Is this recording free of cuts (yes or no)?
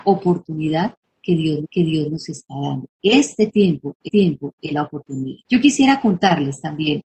no